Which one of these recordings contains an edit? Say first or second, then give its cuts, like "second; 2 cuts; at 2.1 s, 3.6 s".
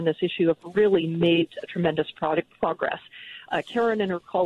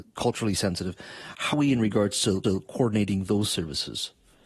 second; 2 cuts; at 1.5 s, 2.4 s